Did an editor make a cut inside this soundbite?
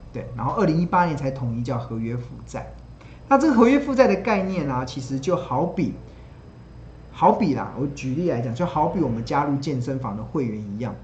no; 0 cuts

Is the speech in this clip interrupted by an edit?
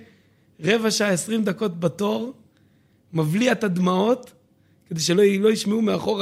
no; 0 cuts

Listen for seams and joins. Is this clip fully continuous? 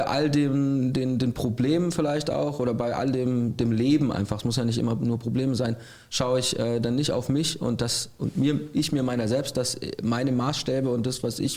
yes; 0 cuts

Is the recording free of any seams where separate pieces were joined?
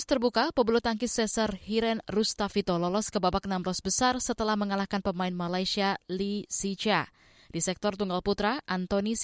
yes; 0 cuts

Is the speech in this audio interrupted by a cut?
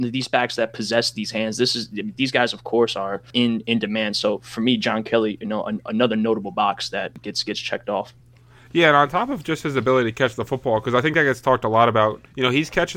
no; 0 cuts

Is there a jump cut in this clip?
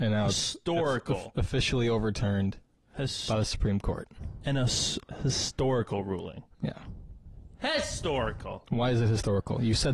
no; 0 cuts

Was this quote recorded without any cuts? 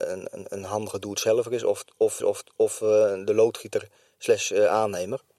no; 1 cut; at 2.2 s

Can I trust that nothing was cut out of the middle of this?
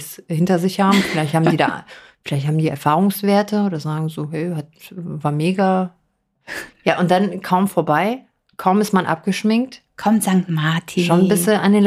no; 1 cut; at 6.7 s

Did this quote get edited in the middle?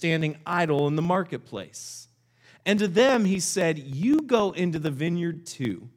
no; 0 cuts

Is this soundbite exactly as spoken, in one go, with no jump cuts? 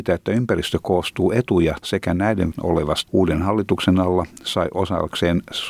no; 3 cuts; at 1.8 s, 2.5 s, 3.1 s

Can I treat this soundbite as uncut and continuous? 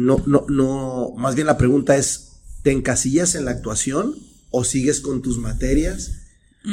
yes; 0 cuts

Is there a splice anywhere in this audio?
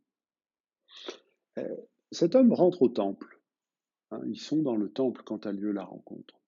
no; 0 cuts

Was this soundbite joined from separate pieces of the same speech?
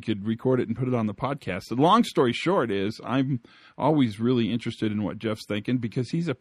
no; 0 cuts

